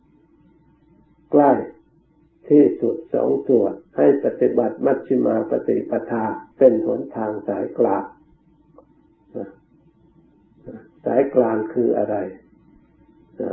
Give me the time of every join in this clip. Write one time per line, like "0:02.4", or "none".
0:06.5